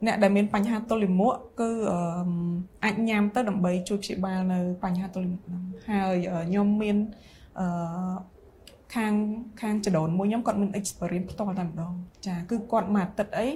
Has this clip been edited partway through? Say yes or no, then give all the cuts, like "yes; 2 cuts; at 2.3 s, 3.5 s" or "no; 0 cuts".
no; 0 cuts